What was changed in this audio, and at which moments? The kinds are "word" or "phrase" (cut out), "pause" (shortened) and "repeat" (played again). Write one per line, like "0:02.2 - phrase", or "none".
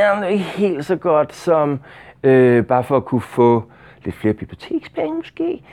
none